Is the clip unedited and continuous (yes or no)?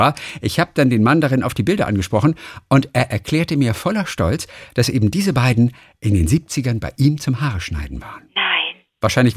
yes